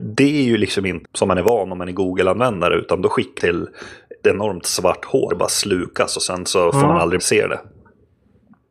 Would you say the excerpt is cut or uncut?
cut